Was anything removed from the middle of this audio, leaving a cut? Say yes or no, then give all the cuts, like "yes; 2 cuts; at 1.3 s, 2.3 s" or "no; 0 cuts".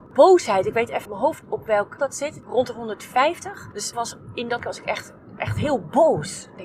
yes; 6 cuts; at 1.0 s, 1.4 s, 2.0 s, 3.9 s, 4.6 s, 5.4 s